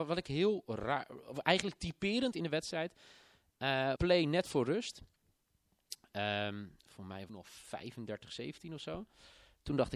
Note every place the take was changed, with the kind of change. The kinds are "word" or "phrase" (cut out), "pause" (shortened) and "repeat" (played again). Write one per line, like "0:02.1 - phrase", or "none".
0:02.3 - phrase
0:04.0 - phrase
0:07.3 - phrase